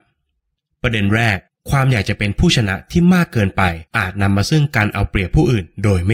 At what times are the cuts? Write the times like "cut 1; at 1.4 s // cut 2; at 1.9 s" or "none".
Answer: cut 1; at 1.5 s // cut 2; at 3.9 s

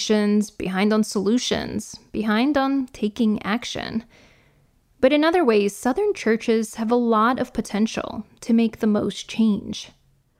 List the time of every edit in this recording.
none

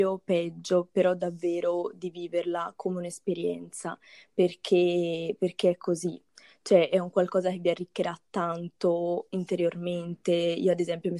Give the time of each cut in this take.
none

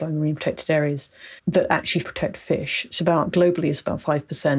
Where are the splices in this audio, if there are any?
cut 1; at 1.4 s // cut 2; at 2.0 s // cut 3; at 3.0 s

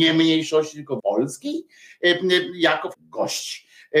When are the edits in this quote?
cut 1; at 1.0 s // cut 2; at 2.9 s

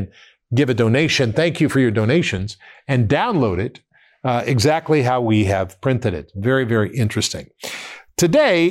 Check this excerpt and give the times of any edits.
none

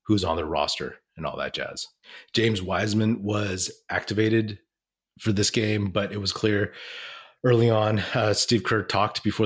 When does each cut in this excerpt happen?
none

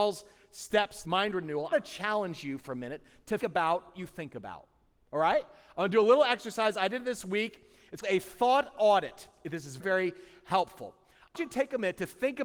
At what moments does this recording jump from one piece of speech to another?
cut 1; at 1.0 s // cut 2; at 1.7 s // cut 3; at 3.4 s // cut 4; at 3.9 s // cut 5; at 8.0 s // cut 6; at 9.8 s // cut 7; at 11.3 s

